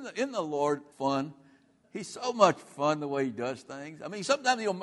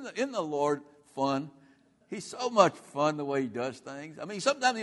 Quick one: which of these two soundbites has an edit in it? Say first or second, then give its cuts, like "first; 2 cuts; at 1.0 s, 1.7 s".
first; 1 cut; at 0.9 s